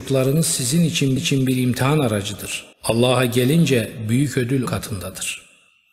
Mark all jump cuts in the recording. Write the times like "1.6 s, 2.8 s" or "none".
1.2 s, 2.7 s, 4.7 s